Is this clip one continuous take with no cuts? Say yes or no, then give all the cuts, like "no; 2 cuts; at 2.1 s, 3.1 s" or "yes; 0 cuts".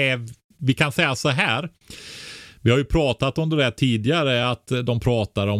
yes; 0 cuts